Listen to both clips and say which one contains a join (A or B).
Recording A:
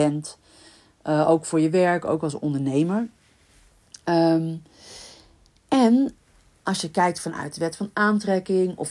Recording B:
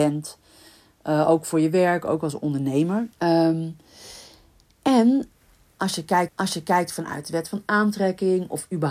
B